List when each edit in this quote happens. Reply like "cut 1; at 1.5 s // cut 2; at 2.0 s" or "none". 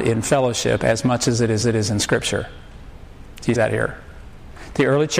cut 1; at 1.6 s // cut 2; at 3.5 s